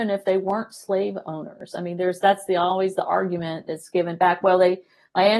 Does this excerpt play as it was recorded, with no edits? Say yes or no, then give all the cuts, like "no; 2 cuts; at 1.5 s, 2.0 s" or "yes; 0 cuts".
yes; 0 cuts